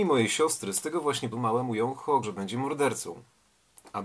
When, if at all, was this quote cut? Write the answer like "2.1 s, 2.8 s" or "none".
1.3 s, 2.2 s